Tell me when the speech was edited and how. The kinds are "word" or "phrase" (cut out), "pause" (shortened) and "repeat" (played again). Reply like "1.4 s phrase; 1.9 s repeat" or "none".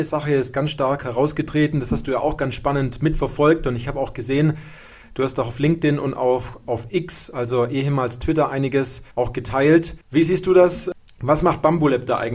9.1 s pause; 10.0 s pause